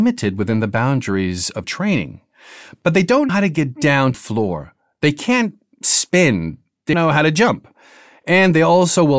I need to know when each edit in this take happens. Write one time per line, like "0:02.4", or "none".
0:01.6
0:03.3
0:04.1
0:06.9